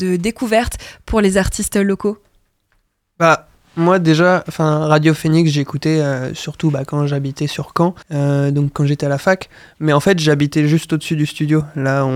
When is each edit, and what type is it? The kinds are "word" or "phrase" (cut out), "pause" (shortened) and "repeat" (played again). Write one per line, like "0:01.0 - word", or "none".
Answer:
0:08.0 - pause

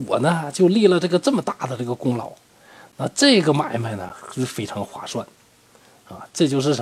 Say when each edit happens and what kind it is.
none

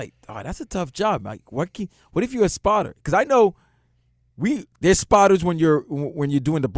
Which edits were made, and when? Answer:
none

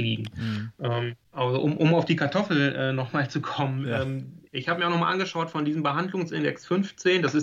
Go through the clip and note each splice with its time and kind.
0:04.5 - pause

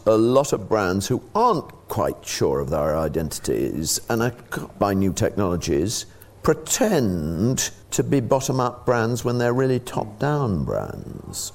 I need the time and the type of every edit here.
0:04.7 - phrase
0:07.8 - pause

